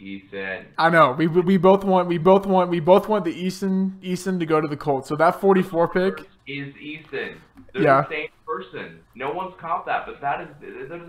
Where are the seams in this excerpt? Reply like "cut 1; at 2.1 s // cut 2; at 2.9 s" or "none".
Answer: cut 1; at 2.2 s // cut 2; at 6.4 s // cut 3; at 9.0 s